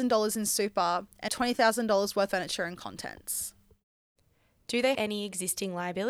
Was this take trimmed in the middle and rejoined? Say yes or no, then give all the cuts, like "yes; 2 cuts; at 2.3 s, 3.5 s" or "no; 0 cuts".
yes; 3 cuts; at 1.3 s, 2.3 s, 4.9 s